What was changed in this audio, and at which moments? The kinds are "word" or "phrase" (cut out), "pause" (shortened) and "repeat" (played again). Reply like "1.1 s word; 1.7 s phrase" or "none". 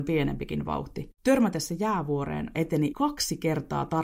1.1 s pause; 2.5 s word; 2.9 s word